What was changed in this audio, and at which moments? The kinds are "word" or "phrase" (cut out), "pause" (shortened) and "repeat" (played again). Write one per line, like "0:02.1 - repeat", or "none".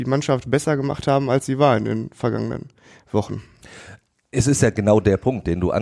none